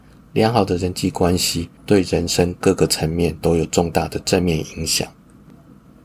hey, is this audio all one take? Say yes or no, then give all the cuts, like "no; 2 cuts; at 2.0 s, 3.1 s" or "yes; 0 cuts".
no; 1 cut; at 1.8 s